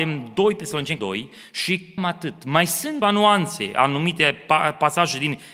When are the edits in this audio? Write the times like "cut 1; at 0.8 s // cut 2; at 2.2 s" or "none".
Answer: cut 1; at 1.0 s // cut 2; at 2.0 s // cut 3; at 3.0 s